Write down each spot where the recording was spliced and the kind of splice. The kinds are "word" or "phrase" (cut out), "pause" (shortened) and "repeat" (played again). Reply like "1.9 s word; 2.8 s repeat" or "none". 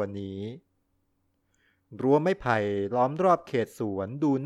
none